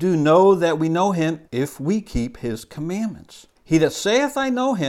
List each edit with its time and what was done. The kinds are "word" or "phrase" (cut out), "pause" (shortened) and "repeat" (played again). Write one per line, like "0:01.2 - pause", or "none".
0:01.5 - pause
0:03.6 - pause